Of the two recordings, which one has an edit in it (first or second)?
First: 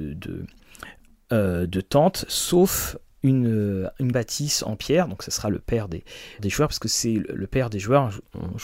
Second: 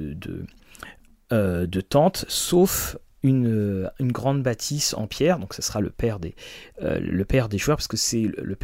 first